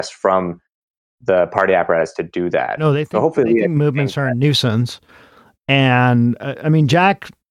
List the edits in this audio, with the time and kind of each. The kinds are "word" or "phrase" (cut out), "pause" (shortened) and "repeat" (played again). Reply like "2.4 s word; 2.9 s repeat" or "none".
none